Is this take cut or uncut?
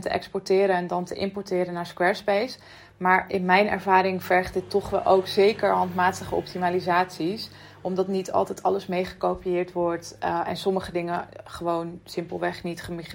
uncut